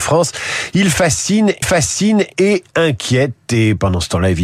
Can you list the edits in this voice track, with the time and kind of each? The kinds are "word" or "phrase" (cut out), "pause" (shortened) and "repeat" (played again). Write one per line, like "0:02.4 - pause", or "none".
0:01.6 - repeat